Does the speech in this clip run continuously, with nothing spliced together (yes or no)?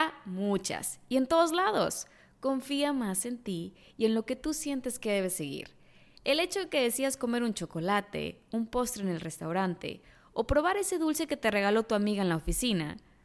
yes